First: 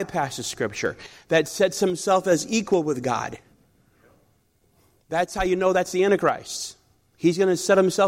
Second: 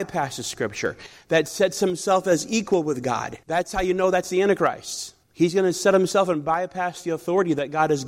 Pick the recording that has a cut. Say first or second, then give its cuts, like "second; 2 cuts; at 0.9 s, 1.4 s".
second; 2 cuts; at 3.4 s, 5.2 s